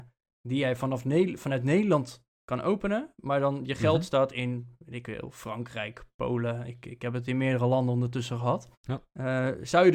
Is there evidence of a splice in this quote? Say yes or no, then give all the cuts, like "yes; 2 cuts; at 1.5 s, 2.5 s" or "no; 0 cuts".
yes; 1 cut; at 8.7 s